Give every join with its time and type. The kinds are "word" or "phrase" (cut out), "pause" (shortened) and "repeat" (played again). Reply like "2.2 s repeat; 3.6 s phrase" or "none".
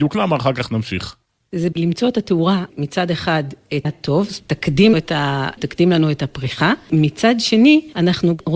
1.7 s word; 2.7 s word; 3.8 s word; 4.4 s word; 4.9 s word; 5.6 s word